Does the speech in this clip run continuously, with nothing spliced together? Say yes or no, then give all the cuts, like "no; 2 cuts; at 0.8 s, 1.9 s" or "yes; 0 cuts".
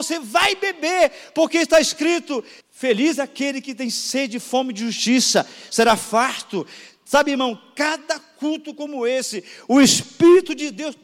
no; 1 cut; at 2.6 s